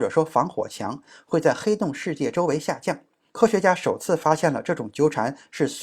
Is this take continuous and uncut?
yes; 0 cuts

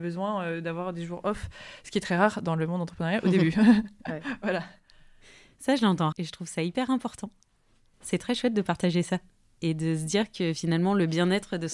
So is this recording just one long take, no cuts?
no; 1 cut; at 6.1 s

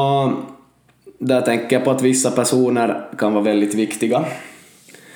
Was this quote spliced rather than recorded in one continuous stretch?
no; 0 cuts

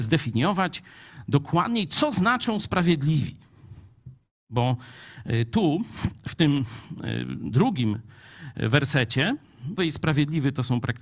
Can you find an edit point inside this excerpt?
yes; 1 cut; at 9.8 s

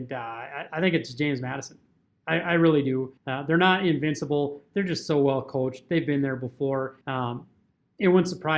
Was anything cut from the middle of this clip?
yes; 2 cuts; at 3.2 s, 7.0 s

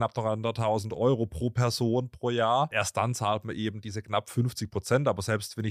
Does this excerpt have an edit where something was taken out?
no; 0 cuts

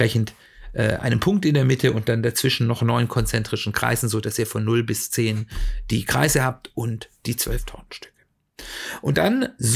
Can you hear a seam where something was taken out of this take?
no; 0 cuts

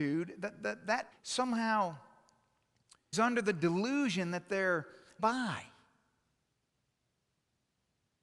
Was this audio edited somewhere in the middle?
yes; 3 cuts; at 1.1 s, 3.1 s, 5.2 s

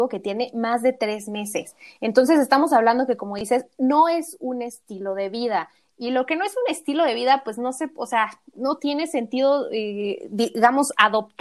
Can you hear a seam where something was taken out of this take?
no; 0 cuts

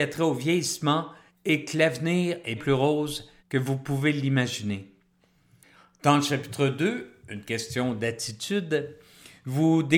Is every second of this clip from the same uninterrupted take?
no; 3 cuts; at 1.3 s, 2.6 s, 3.4 s

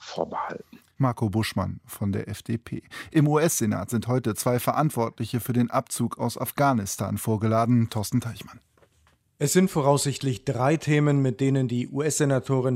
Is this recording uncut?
yes; 0 cuts

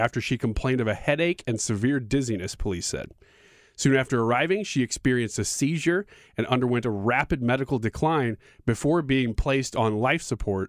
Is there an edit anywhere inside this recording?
no; 0 cuts

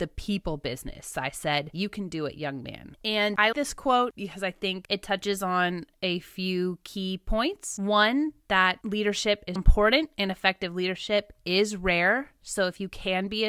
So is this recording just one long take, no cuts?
no; 3 cuts; at 3.5 s, 4.1 s, 9.6 s

